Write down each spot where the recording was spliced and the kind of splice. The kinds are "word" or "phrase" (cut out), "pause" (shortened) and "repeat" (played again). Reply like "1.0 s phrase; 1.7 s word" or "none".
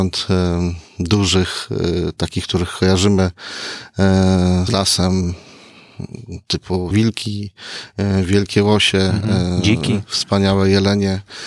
4.7 s word; 6.9 s word